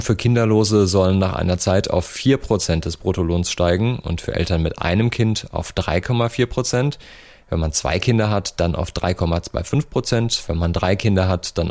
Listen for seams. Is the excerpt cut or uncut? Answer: uncut